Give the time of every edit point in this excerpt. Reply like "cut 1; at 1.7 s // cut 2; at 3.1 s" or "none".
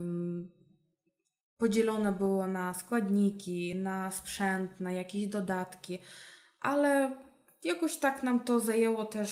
none